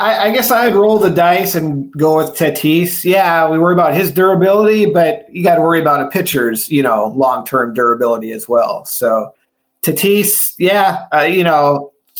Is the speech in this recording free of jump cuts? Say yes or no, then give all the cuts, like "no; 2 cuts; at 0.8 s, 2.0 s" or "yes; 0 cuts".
yes; 0 cuts